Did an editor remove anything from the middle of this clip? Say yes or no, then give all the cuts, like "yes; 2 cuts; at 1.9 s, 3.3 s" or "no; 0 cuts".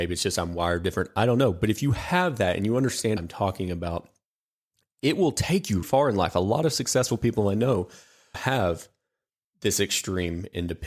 yes; 3 cuts; at 3.2 s, 5.8 s, 8.3 s